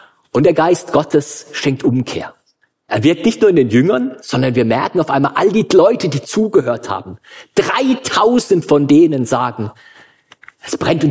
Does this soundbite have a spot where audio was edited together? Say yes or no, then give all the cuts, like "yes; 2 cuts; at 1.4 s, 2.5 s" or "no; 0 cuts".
no; 0 cuts